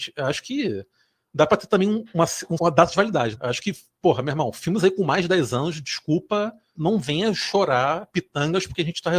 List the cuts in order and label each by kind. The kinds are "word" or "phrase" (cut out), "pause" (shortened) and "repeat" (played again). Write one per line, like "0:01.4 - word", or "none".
0:02.6 - word
0:03.3 - word
0:06.7 - word